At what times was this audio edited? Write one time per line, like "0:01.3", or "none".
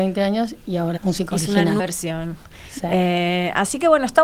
0:01.0
0:01.8